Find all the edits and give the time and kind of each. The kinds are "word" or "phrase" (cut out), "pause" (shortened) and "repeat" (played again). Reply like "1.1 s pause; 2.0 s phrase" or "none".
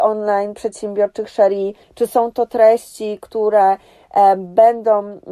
1.8 s pause